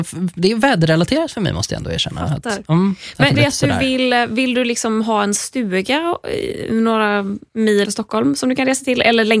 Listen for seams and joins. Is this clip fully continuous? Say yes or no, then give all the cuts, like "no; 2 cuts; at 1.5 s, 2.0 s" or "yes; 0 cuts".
no; 2 cuts; at 3.3 s, 7.8 s